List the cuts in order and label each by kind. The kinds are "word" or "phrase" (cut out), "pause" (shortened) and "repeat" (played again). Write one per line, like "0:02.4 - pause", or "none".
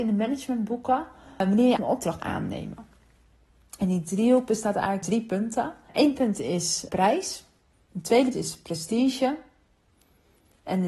0:01.8 - word
0:02.2 - word
0:05.0 - word
0:06.9 - word
0:08.3 - word